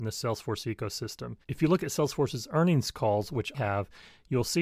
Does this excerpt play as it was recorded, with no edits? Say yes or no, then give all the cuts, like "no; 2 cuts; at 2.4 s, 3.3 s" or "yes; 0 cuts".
no; 2 cuts; at 1.4 s, 3.5 s